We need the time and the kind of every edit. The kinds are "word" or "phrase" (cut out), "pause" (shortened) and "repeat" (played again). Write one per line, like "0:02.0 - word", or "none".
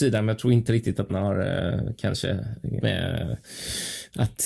0:01.1 - word
0:02.8 - word